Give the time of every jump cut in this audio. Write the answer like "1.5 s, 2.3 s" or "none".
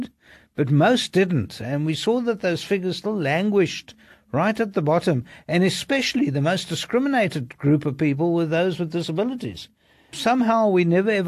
none